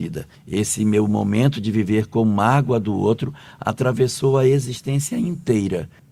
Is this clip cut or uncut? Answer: uncut